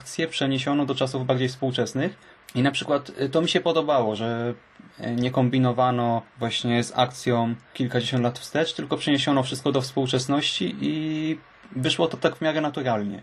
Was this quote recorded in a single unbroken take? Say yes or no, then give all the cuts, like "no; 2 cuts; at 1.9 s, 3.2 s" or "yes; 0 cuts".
yes; 0 cuts